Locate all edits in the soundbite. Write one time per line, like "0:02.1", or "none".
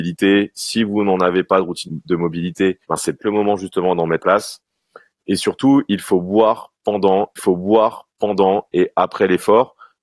0:01.9
0:02.8
0:03.2
0:04.2
0:07.4